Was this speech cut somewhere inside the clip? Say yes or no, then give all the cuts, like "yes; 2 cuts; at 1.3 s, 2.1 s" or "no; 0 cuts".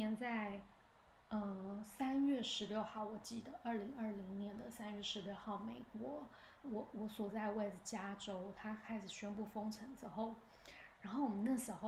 yes; 1 cut; at 6.6 s